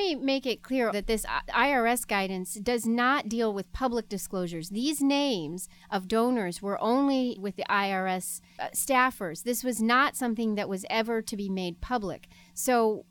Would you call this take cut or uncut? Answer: cut